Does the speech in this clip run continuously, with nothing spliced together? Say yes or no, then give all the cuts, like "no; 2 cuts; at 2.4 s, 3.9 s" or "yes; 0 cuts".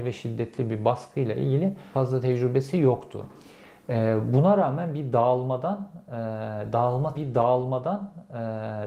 no; 2 cuts; at 1.9 s, 7.1 s